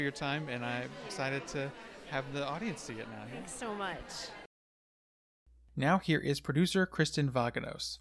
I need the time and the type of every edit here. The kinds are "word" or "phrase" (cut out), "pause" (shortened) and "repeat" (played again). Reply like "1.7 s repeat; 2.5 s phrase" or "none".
none